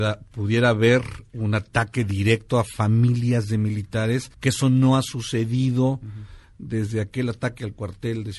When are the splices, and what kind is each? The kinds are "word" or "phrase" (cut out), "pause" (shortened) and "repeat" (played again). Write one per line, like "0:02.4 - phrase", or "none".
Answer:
0:04.3 - pause